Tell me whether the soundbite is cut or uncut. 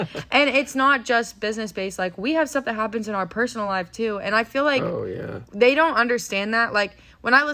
uncut